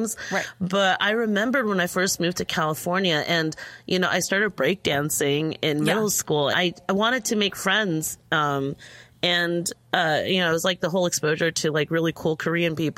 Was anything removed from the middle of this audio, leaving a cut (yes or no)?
yes